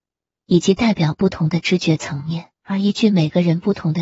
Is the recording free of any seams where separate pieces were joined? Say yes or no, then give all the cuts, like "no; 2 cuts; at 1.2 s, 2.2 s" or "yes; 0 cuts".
no; 1 cut; at 2.5 s